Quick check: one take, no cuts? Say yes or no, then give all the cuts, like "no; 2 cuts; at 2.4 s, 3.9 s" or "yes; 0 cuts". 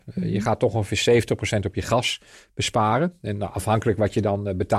yes; 0 cuts